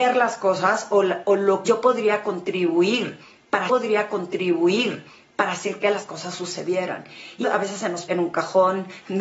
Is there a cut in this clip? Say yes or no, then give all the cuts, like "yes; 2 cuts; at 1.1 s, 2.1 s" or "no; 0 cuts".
yes; 4 cuts; at 1.6 s, 3.7 s, 7.4 s, 8.1 s